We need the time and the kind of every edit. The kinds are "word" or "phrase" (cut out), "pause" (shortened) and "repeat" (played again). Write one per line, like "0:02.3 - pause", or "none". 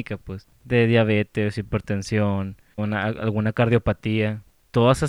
0:02.8 - word

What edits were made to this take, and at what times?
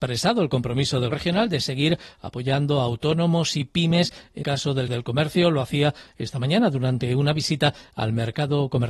0:01.1 - word
0:04.4 - word
0:04.9 - word

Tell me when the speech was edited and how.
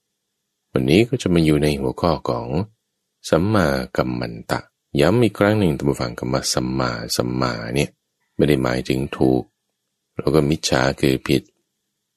0:04.7 - pause
0:08.2 - pause

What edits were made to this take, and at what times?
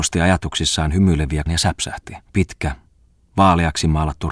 0:01.5 - word
0:02.3 - pause

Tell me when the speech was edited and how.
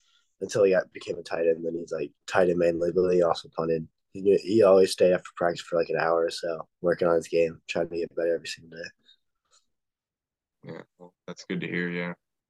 0:02.2 - pause
0:06.7 - pause
0:11.1 - pause

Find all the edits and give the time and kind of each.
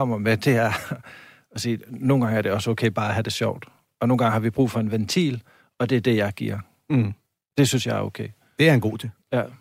none

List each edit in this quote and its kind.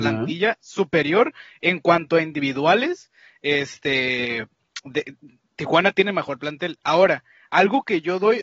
none

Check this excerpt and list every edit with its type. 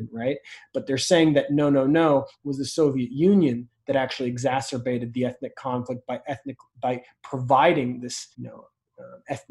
0:08.3 - pause

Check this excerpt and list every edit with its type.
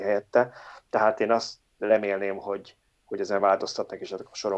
none

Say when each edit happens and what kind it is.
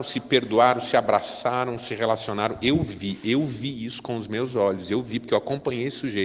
none

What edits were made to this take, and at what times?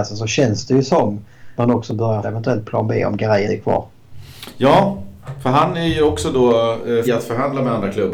0:01.6 - word
0:02.2 - word
0:03.5 - word
0:07.0 - word

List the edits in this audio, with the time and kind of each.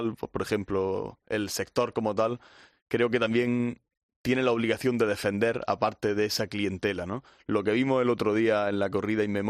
none

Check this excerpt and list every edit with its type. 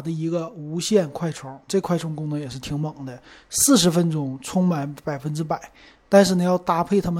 0:01.7 - word

